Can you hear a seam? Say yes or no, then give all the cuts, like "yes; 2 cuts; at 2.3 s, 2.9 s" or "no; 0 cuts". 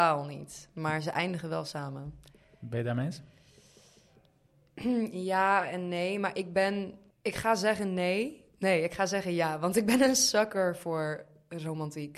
yes; 1 cut; at 8.5 s